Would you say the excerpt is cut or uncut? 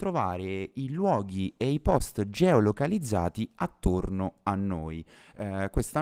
uncut